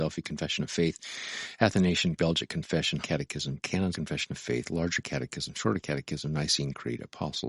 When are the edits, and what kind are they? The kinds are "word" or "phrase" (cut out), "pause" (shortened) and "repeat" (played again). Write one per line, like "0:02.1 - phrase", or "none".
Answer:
0:02.2 - word
0:03.0 - word
0:03.9 - phrase